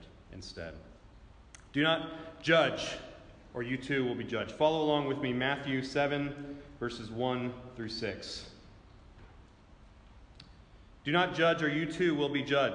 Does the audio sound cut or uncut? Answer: uncut